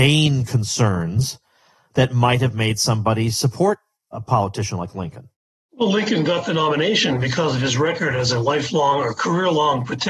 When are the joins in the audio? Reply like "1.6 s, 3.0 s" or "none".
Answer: none